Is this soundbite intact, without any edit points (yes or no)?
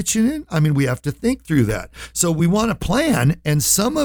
yes